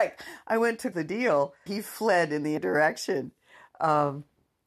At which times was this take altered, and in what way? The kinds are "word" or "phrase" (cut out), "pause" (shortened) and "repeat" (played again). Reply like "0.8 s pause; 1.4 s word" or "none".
0.9 s word; 1.7 s word; 2.6 s word